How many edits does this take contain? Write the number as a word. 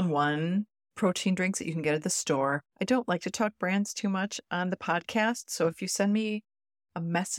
one